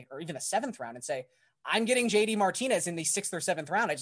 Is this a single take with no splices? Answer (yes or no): yes